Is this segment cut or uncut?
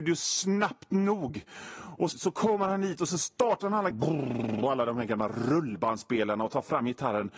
cut